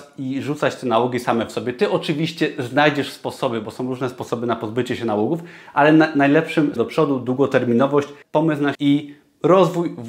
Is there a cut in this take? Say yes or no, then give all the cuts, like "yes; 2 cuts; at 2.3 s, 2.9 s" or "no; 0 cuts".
yes; 3 cuts; at 6.8 s, 8.2 s, 8.7 s